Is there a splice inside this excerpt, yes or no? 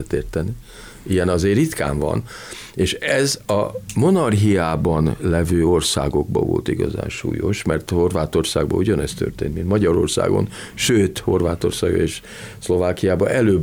no